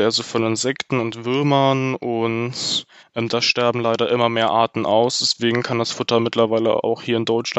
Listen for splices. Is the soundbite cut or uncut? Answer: uncut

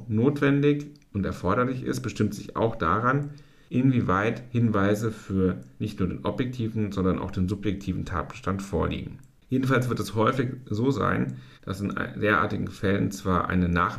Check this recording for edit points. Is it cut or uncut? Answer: uncut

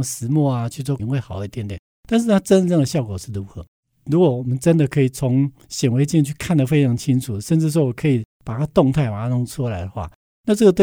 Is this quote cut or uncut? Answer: cut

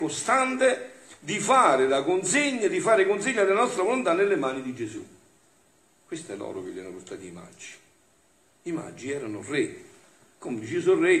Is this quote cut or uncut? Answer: uncut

